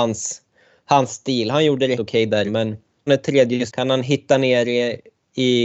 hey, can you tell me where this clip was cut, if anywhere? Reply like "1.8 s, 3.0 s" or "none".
2.0 s, 2.5 s, 3.1 s, 3.7 s